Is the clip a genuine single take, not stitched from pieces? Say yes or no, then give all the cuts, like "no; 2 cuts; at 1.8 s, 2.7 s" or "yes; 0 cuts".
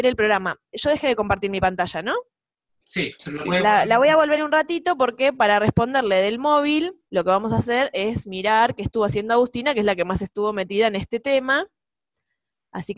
no; 3 cuts; at 2.7 s, 4.4 s, 7.1 s